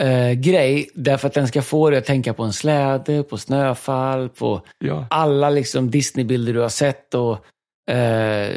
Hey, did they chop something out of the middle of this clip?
no; 0 cuts

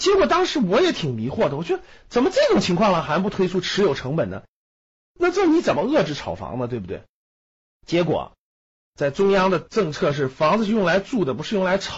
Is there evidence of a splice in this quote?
no; 0 cuts

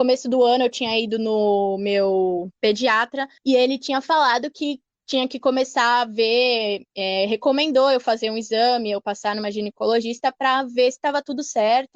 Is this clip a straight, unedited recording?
no; 1 cut; at 3.4 s

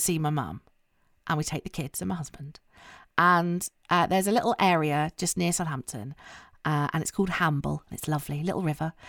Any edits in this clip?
no; 0 cuts

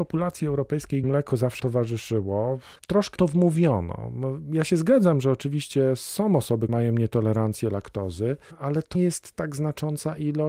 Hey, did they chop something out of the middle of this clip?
yes; 5 cuts; at 1.0 s, 1.6 s, 3.2 s, 6.7 s, 8.9 s

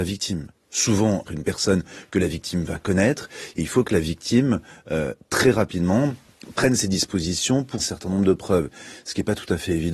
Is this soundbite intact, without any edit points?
no; 2 cuts; at 1.3 s, 7.8 s

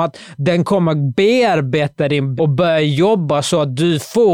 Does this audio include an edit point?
yes; 1 cut; at 2.4 s

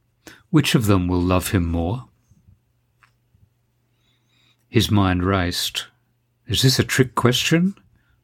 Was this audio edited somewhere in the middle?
no; 0 cuts

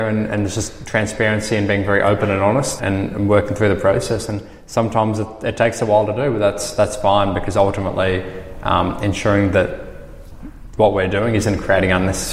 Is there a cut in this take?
yes; 1 cut; at 2.8 s

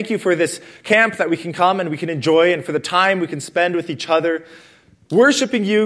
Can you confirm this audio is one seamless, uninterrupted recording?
yes; 0 cuts

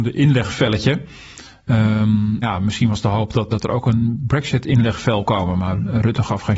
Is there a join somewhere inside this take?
yes; 3 cuts; at 2.4 s, 3.5 s, 5.3 s

